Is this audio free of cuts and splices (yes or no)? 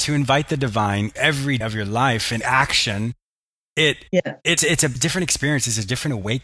no